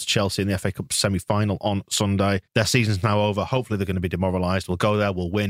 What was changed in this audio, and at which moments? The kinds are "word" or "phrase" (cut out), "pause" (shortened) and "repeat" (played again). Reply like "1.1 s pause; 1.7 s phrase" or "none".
2.5 s pause